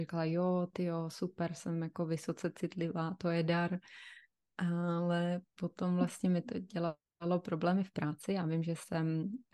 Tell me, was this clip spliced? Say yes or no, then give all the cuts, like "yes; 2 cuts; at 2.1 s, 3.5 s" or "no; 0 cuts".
no; 0 cuts